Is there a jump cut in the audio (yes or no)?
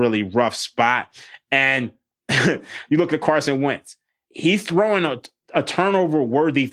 no